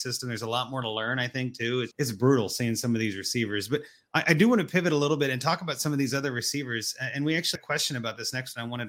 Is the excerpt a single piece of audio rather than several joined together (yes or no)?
no